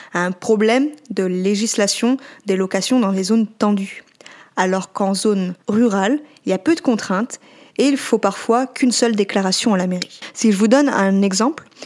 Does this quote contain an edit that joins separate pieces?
no; 0 cuts

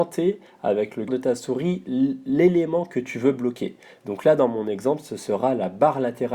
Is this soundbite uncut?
no; 1 cut; at 1.1 s

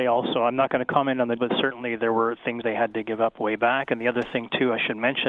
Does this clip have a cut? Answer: yes; 2 cuts; at 1.4 s, 2.6 s

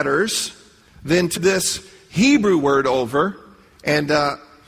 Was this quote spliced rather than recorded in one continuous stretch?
yes; 1 cut; at 1.4 s

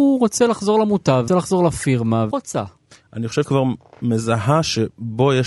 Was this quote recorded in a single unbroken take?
no; 3 cuts; at 1.3 s, 2.3 s, 3.4 s

